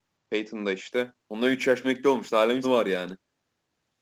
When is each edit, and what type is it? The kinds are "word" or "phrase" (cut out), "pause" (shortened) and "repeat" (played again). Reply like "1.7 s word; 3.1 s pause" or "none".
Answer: 1.2 s pause; 1.8 s word; 2.6 s word

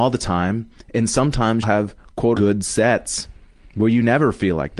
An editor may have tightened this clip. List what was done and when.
1.6 s word; 2.3 s word

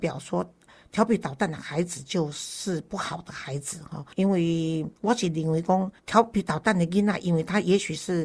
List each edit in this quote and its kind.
4.1 s pause; 5.0 s pause; 6.0 s pause

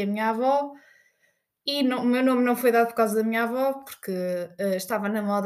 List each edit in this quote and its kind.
none

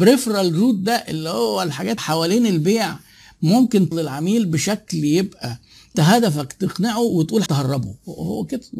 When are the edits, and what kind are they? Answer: 2.0 s word; 3.9 s word; 5.9 s word; 7.5 s word

